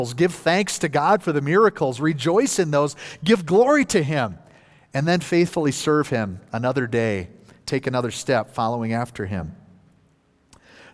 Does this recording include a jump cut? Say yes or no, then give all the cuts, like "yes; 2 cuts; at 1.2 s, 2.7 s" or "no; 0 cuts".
no; 0 cuts